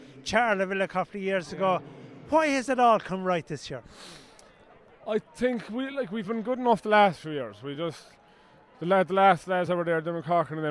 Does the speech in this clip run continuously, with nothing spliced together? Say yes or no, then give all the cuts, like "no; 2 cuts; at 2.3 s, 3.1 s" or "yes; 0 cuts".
yes; 0 cuts